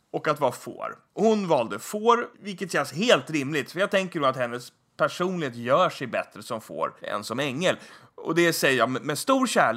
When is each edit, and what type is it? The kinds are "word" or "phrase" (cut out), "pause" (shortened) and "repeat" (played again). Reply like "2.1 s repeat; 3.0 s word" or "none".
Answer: 1.1 s pause; 2.3 s pause; 7.0 s pause